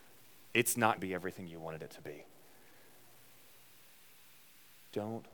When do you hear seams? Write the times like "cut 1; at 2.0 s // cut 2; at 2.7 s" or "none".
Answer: cut 1; at 1.0 s